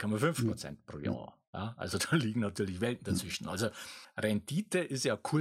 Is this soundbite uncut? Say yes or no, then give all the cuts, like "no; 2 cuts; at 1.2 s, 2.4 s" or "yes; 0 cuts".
yes; 0 cuts